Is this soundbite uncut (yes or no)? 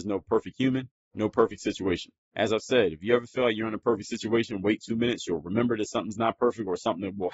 no